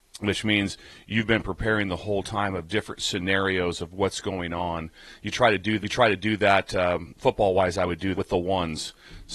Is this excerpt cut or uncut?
cut